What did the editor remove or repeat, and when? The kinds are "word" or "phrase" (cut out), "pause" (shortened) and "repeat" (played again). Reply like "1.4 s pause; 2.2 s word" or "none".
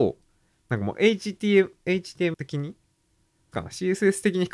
2.3 s word; 3.5 s word